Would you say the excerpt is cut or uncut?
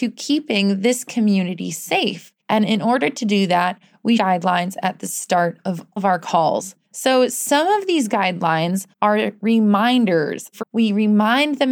cut